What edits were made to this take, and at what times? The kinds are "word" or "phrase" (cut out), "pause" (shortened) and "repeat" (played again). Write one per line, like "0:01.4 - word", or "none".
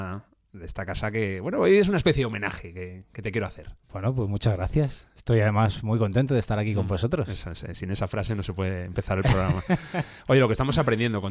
0:03.8 - pause